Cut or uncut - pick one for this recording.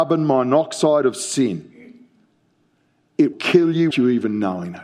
cut